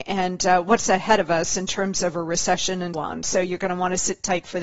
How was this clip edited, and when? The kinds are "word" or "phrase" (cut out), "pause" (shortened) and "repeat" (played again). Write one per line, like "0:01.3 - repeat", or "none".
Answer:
0:02.9 - word

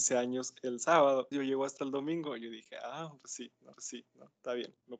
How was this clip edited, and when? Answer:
0:01.3 - word
0:03.7 - repeat

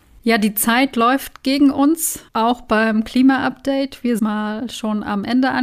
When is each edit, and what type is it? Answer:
0:02.3 - pause
0:04.2 - phrase

